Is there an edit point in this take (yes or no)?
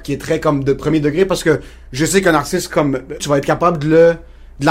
yes